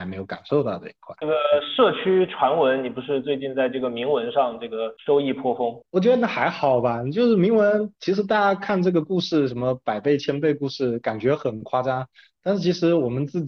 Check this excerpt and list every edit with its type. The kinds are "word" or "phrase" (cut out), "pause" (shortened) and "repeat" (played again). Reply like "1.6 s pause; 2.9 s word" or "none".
5.0 s pause; 5.8 s pause; 8.0 s pause